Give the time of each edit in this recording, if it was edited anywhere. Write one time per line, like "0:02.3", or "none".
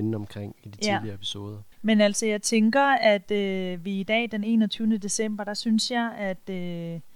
0:01.7